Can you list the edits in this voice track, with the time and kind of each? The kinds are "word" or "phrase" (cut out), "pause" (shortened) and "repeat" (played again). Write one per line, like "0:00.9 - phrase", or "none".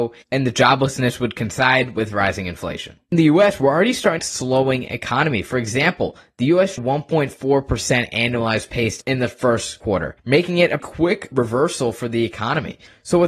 0:04.2 - phrase
0:06.8 - phrase
0:10.2 - pause
0:10.8 - word